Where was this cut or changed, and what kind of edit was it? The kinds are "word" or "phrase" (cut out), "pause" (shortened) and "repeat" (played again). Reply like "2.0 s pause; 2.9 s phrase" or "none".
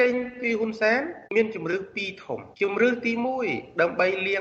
1.3 s pause; 2.5 s pause